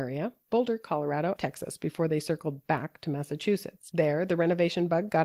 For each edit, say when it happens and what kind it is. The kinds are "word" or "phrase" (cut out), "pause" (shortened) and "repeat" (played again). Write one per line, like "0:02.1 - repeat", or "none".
0:01.4 - phrase